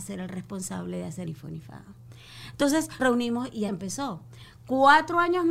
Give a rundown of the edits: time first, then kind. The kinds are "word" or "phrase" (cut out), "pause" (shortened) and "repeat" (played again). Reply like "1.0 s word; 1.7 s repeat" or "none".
1.2 s phrase; 3.0 s word; 3.7 s word